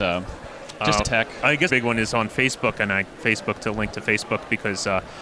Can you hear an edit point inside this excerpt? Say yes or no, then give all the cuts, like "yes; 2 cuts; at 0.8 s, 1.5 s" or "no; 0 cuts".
yes; 4 cuts; at 1.0 s, 1.7 s, 3.2 s, 3.9 s